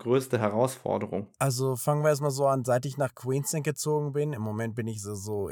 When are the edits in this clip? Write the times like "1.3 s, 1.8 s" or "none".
1.3 s